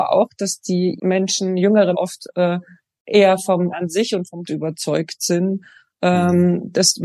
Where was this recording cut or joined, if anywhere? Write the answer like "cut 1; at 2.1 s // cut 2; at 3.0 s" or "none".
cut 1; at 1.0 s // cut 2; at 1.9 s // cut 3; at 3.7 s // cut 4; at 4.4 s